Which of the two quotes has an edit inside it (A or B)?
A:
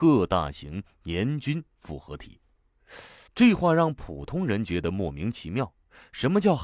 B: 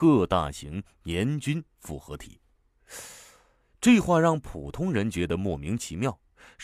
A